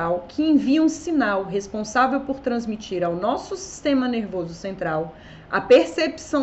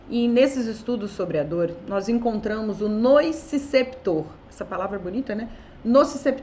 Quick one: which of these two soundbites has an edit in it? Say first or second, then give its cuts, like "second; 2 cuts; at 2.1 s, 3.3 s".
second; 1 cut; at 4.4 s